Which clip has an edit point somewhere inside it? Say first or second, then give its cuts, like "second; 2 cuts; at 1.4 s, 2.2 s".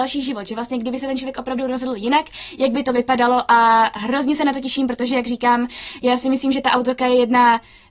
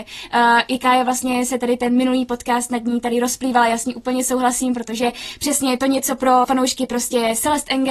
second; 1 cut; at 6.4 s